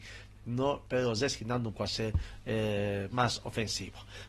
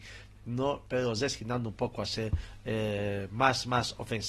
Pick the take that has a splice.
first; 2 cuts; at 1.8 s, 3.1 s

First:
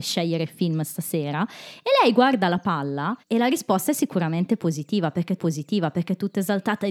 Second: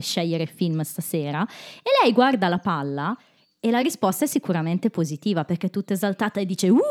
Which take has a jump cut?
first; 2 cuts; at 3.2 s, 5.4 s

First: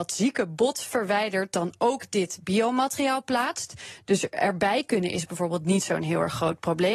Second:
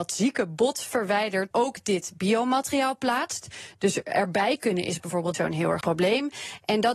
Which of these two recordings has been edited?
second; 3 cuts; at 1.5 s, 5.3 s, 5.8 s

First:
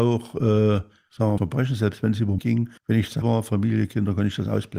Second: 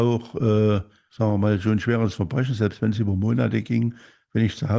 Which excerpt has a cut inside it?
first; 4 cuts; at 1.4 s, 2.4 s, 2.8 s, 3.2 s

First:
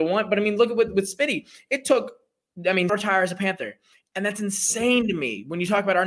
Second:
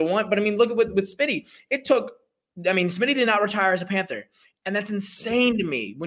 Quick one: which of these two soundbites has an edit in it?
first; 1 cut; at 2.9 s

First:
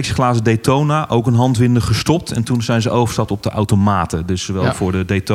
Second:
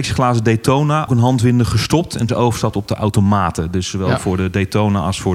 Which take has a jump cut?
second; 2 cuts; at 1.1 s, 2.3 s

